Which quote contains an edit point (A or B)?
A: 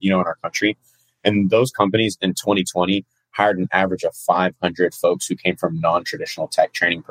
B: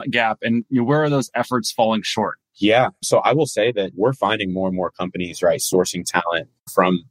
B